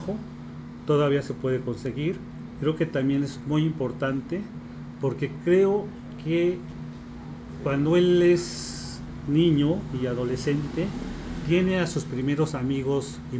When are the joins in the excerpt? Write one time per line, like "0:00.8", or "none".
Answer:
none